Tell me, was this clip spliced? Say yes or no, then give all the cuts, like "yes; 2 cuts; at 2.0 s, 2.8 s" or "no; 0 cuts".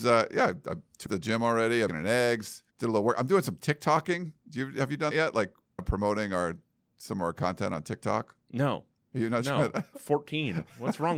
yes; 7 cuts; at 1.1 s, 1.9 s, 2.7 s, 5.1 s, 5.8 s, 9.0 s, 9.9 s